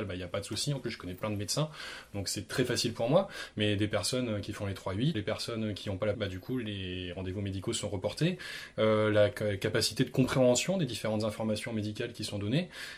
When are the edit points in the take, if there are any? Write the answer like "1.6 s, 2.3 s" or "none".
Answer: 5.1 s, 6.1 s